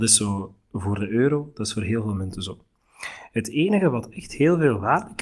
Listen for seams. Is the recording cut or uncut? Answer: uncut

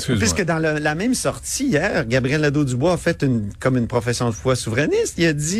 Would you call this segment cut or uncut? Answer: uncut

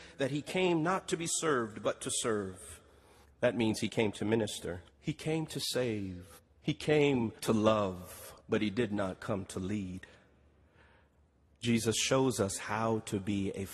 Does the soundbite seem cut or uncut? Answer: cut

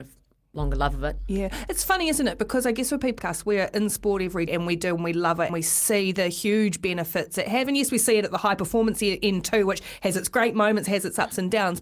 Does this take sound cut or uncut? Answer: cut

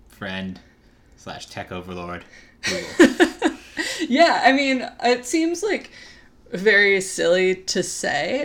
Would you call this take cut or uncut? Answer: uncut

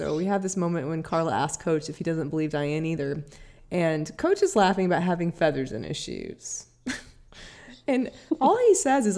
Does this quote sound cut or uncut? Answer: uncut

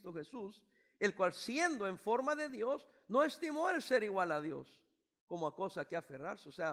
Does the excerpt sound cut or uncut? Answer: uncut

